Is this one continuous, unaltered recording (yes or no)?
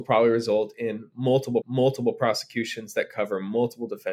no